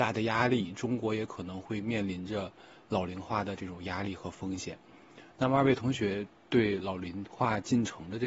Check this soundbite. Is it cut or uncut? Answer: uncut